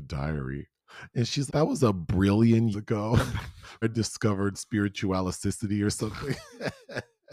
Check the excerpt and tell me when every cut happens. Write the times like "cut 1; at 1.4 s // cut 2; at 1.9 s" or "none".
cut 1; at 1.5 s // cut 2; at 2.7 s // cut 3; at 3.8 s